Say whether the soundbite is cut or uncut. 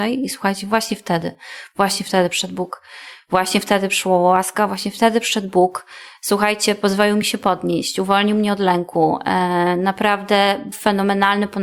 uncut